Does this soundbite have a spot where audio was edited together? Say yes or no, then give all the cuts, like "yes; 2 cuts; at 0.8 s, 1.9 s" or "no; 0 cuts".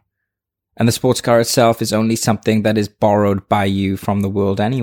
no; 0 cuts